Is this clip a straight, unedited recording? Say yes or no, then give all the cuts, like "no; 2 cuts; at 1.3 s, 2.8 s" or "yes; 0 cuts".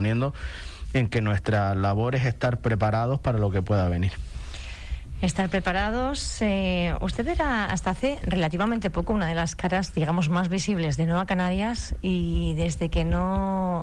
yes; 0 cuts